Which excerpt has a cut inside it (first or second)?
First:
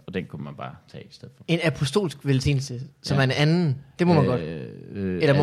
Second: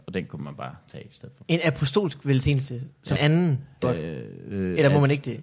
second